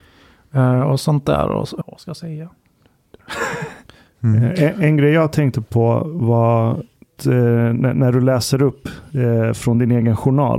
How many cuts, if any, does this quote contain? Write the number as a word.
two